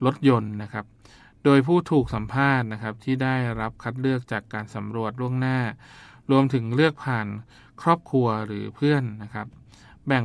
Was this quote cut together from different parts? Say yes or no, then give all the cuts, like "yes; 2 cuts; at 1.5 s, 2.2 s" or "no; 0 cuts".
no; 0 cuts